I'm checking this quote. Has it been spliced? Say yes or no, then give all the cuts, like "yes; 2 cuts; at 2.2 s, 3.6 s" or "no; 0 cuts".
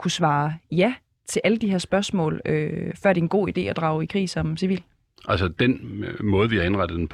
no; 0 cuts